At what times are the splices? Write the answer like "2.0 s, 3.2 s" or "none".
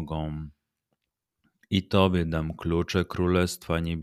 none